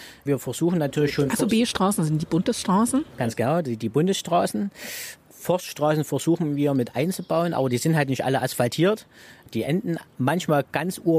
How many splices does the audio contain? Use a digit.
0